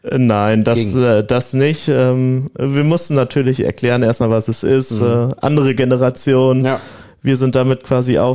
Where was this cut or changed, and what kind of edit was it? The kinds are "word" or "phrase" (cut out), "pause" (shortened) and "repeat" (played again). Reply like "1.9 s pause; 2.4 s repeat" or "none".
none

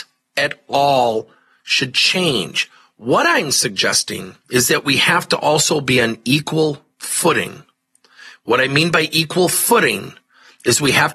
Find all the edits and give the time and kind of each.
4.4 s pause

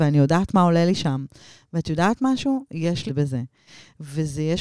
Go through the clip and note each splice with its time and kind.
3.1 s phrase

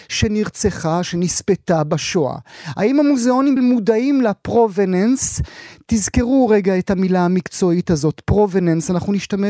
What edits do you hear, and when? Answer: 3.6 s word

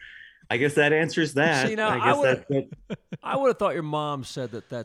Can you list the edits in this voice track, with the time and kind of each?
none

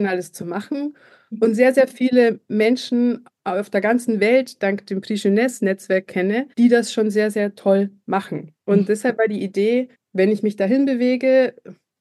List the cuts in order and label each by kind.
6.5 s pause; 8.6 s pause; 9.9 s pause

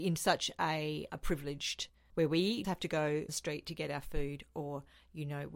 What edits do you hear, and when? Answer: 1.1 s word; 2.1 s word; 2.6 s word; 3.3 s word

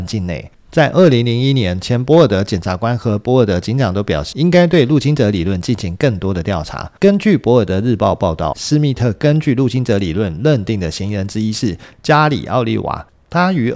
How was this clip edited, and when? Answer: 4.3 s word; 7.0 s pause; 8.5 s word

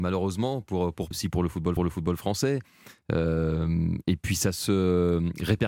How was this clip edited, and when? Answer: 1.1 s word; 1.8 s repeat

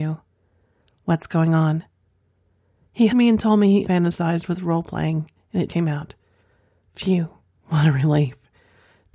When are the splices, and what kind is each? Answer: 3.1 s word; 3.8 s word; 5.7 s word

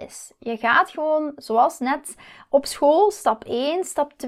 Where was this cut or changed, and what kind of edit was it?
none

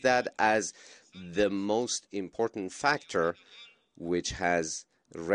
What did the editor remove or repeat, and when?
none

